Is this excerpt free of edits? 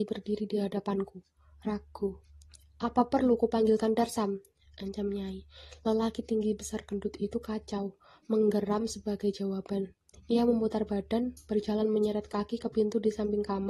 yes; 0 cuts

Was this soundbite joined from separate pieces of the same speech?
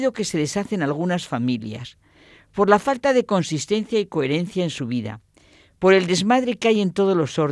no; 0 cuts

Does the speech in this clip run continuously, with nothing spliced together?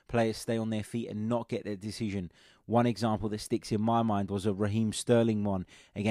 yes; 0 cuts

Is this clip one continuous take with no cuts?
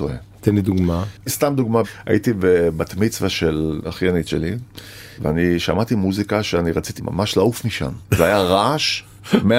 no; 1 cut; at 1.2 s

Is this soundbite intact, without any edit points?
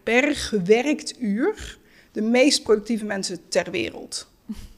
yes; 0 cuts

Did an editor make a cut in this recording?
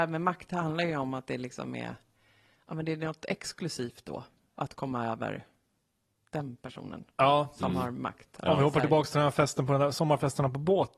no; 0 cuts

